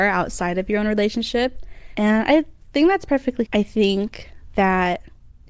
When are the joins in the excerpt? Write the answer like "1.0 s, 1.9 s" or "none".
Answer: 3.5 s